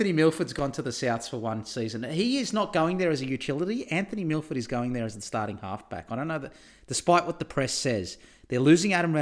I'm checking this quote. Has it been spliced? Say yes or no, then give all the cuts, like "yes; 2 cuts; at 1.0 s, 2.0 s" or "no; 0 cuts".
no; 0 cuts